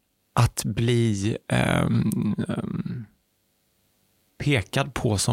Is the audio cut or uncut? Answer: uncut